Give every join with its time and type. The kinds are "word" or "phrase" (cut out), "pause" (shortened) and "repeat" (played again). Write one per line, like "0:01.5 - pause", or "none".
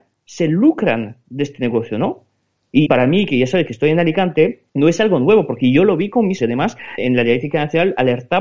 0:02.9 - phrase
0:04.7 - pause
0:06.4 - word
0:07.0 - word